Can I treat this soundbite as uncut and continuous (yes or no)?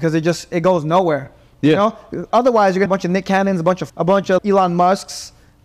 no